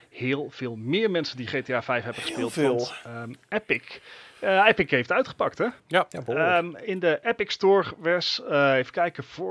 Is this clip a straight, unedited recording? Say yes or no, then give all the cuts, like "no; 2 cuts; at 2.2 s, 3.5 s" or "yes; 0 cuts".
no; 1 cut; at 5.8 s